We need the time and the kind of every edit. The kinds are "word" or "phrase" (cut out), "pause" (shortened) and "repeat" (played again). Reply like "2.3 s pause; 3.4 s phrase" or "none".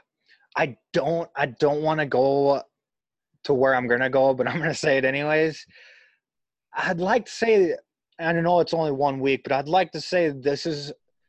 none